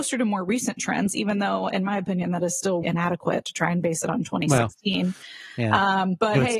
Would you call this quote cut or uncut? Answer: cut